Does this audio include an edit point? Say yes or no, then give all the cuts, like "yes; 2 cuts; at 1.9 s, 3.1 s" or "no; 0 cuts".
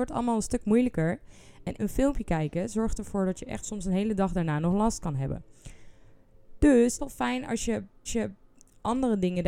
yes; 4 cuts; at 1.8 s, 3.6 s, 7.0 s, 8.1 s